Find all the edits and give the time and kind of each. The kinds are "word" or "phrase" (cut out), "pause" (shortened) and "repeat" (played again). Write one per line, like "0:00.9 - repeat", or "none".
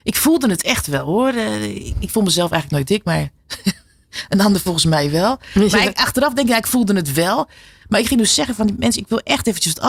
none